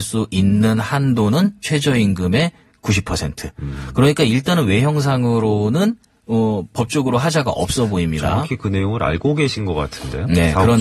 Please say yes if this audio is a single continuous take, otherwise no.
yes